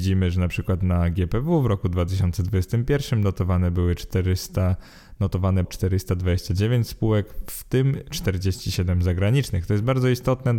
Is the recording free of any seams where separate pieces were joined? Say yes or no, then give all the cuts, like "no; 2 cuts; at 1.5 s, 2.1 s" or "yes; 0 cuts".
no; 1 cut; at 5.6 s